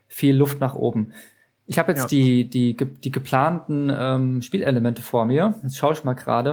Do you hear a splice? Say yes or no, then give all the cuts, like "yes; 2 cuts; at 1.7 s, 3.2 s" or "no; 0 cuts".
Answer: no; 0 cuts